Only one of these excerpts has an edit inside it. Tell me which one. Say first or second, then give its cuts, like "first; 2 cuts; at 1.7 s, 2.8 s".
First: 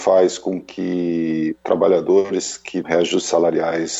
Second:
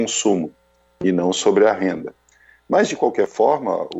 first; 2 cuts; at 1.6 s, 2.8 s